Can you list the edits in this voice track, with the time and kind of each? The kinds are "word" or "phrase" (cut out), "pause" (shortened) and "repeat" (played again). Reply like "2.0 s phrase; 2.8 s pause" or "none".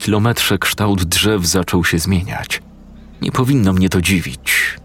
3.1 s pause